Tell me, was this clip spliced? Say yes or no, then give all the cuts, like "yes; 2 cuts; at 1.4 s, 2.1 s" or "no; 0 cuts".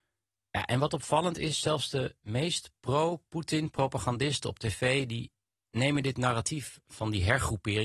no; 0 cuts